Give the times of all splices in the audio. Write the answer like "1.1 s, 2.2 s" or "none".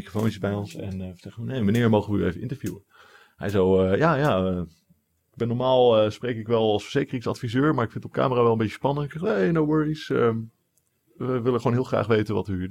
none